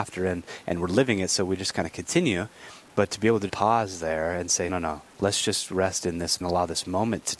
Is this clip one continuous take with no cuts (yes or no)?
no